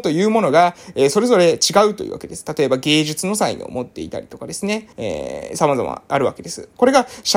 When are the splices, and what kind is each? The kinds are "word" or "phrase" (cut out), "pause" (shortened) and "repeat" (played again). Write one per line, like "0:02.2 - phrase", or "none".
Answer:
0:04.9 - pause